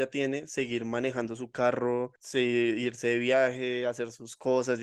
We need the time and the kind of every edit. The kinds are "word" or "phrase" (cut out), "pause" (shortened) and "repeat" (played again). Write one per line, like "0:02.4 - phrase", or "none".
0:02.2 - pause